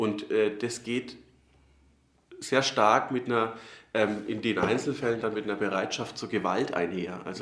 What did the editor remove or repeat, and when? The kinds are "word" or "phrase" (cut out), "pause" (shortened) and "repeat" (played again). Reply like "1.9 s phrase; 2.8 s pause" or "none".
none